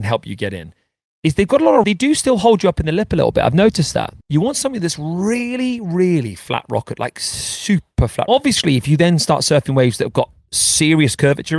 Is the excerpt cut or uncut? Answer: cut